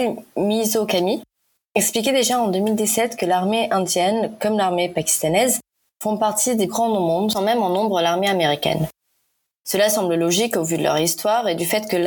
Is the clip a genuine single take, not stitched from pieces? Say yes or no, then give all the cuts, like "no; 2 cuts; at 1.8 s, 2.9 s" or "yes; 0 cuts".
no; 2 cuts; at 6.7 s, 7.3 s